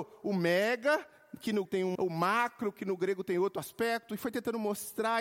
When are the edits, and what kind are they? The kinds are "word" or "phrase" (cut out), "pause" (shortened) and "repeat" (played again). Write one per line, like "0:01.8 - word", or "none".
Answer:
0:01.6 - word
0:01.9 - word

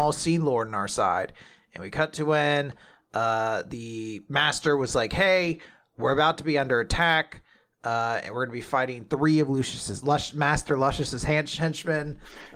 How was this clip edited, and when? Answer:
none

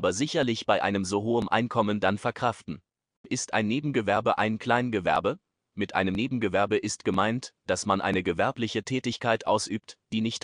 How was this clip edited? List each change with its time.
none

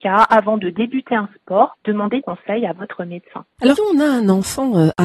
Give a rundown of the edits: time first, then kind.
0:02.2 - word
0:03.8 - word

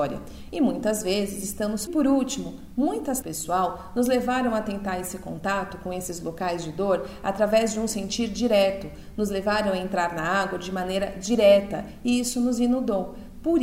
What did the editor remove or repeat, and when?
0:01.9 - phrase
0:03.2 - phrase

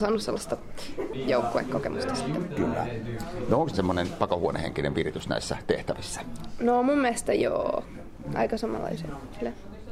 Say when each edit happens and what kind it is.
0:03.7 - phrase

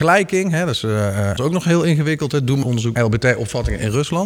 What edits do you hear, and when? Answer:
0:01.4 - word
0:02.6 - word
0:03.0 - word

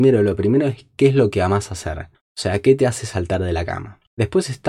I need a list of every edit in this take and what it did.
0:02.1 - pause

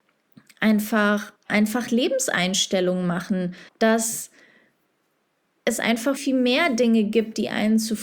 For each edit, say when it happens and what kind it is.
0:01.4 - pause
0:03.7 - pause
0:06.2 - word

